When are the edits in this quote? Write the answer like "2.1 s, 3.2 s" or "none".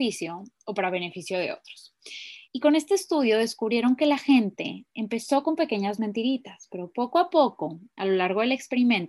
2.4 s

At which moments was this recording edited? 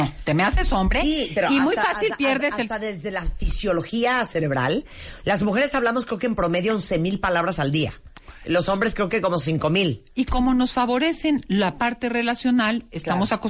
none

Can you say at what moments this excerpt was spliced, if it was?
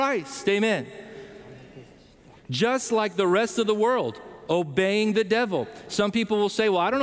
none

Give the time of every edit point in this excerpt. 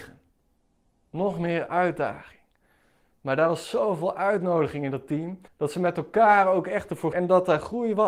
5.5 s, 7.1 s

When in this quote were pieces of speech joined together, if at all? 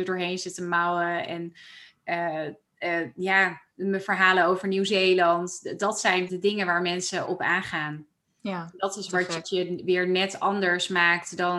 6.3 s, 7.3 s, 9.4 s

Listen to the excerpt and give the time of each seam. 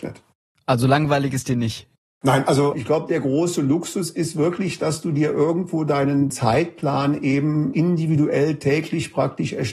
none

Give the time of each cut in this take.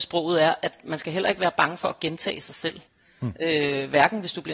2.9 s

